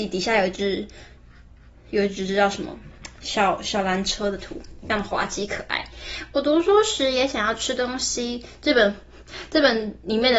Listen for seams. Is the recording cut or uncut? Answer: uncut